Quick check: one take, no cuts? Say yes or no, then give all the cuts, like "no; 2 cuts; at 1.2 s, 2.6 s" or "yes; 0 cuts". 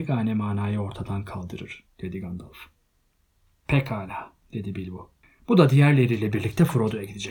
yes; 0 cuts